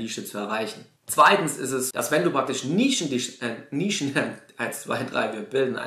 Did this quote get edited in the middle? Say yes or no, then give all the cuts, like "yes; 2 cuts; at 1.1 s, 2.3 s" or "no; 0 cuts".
yes; 2 cuts; at 1.0 s, 1.9 s